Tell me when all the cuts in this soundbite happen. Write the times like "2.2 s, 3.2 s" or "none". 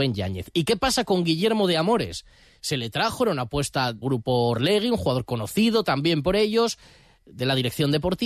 4.0 s

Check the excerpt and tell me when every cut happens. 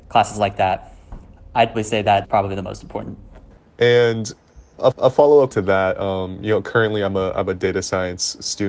1.7 s, 2.2 s, 4.9 s, 5.5 s

